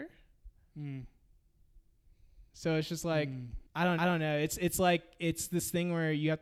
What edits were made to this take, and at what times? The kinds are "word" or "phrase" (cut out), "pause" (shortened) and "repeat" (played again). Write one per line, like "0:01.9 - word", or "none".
0:03.7 - pause
0:04.0 - repeat